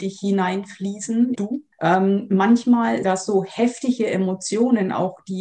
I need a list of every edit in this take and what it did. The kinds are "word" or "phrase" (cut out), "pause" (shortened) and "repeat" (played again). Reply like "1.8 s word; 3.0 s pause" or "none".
1.4 s word; 1.7 s pause; 3.0 s word